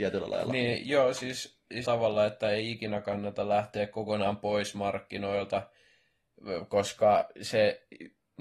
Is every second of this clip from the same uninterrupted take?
no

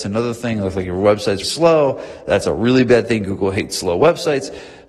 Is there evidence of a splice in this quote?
yes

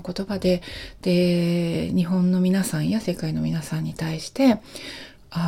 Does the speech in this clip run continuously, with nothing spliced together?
yes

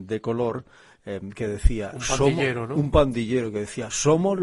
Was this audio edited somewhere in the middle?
no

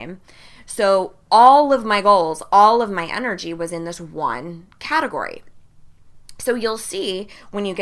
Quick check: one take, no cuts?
yes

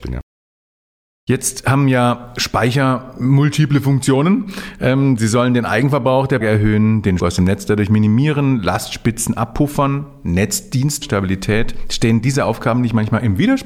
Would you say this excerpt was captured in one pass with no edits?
no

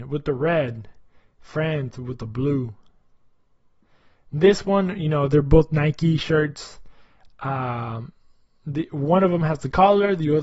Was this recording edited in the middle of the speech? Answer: no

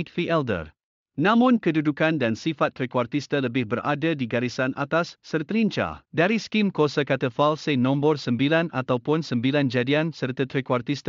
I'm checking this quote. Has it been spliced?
yes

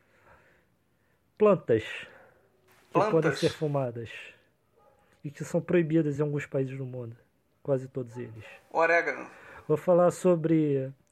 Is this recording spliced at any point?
no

